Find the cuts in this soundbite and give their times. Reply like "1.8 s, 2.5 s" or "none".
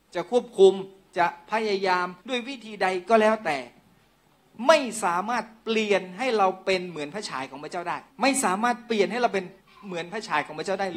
2.2 s, 8.1 s, 9.6 s